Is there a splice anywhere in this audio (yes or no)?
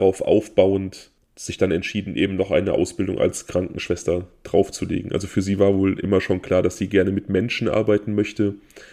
no